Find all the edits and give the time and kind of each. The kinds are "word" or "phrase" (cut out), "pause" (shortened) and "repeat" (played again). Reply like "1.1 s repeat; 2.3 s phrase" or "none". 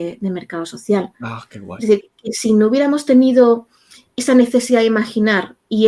2.0 s word

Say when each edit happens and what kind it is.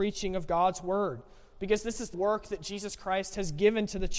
2.1 s word

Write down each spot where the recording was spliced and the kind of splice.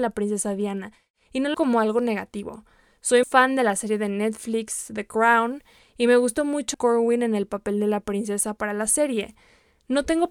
1.5 s word; 3.2 s word; 6.7 s word

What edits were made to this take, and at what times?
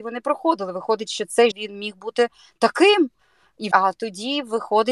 1.5 s word; 3.7 s word

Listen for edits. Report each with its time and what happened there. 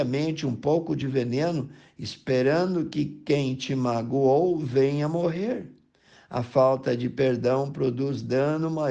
none

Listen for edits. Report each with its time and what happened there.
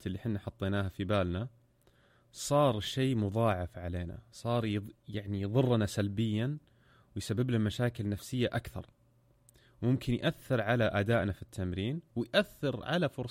none

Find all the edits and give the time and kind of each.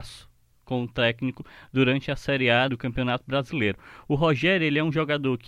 2.7 s word

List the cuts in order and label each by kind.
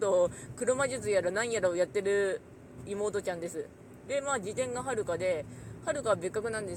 none

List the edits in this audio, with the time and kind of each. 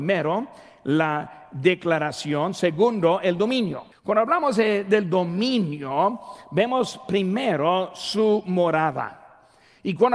3.9 s pause

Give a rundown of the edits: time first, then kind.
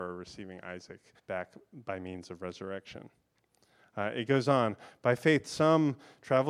1.2 s pause

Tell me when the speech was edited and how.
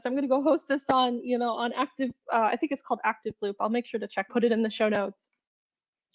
4.3 s phrase

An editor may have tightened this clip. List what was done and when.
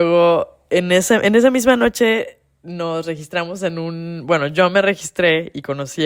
none

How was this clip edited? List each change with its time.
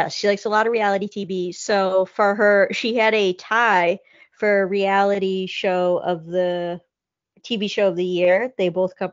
none

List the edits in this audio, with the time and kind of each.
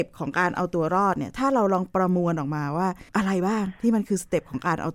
3.1 s pause

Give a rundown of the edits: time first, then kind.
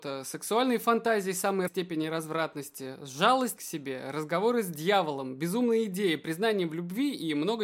1.7 s word; 3.6 s phrase

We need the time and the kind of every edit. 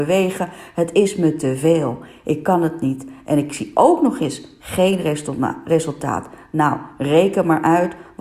none

